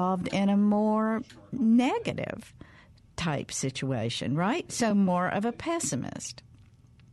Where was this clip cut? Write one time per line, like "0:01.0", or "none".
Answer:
none